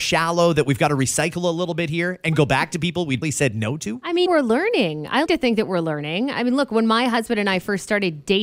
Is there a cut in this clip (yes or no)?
yes